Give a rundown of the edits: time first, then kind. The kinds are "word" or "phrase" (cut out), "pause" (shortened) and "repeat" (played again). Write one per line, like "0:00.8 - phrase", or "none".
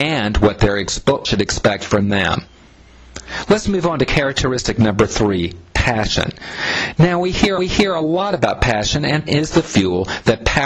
0:01.2 - word
0:07.6 - repeat
0:09.3 - word

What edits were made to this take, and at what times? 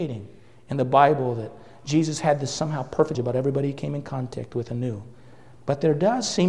0:03.1 - word

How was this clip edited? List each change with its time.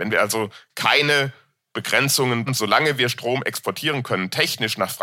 0:02.5 - phrase

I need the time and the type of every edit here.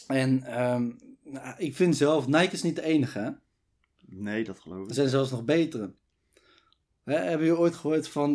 none

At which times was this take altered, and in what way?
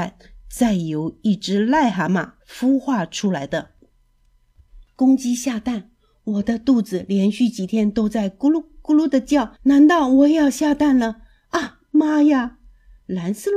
0:09.6 - pause

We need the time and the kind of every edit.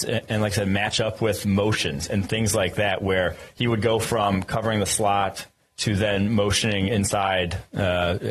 none

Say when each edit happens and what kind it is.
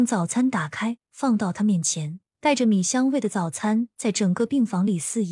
0:01.0 - pause
0:02.3 - pause

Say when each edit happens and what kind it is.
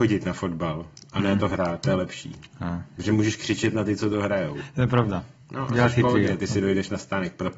none

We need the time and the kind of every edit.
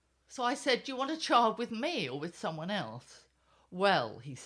none

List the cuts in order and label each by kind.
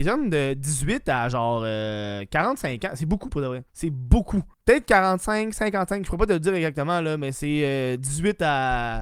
0:03.7 - pause
0:04.5 - pause

